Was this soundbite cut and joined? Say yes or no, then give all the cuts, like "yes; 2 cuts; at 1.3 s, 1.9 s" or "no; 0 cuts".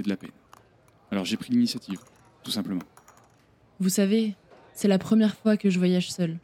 no; 0 cuts